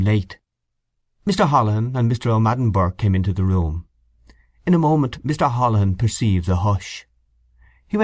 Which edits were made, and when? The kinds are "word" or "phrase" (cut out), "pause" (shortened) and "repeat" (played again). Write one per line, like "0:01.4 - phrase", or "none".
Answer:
none